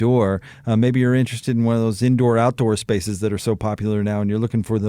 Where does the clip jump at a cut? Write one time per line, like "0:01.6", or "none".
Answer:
none